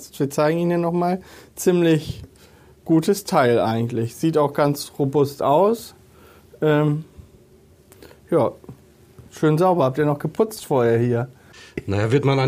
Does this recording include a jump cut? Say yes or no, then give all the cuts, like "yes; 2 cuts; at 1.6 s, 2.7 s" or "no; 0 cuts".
no; 0 cuts